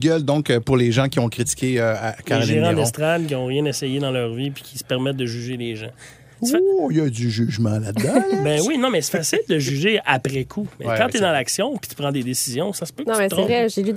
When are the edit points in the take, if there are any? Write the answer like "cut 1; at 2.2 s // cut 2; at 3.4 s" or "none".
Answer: none